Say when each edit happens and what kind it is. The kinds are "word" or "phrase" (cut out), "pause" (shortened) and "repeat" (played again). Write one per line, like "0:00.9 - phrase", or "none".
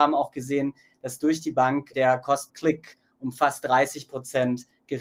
0:01.9 - word
0:02.5 - word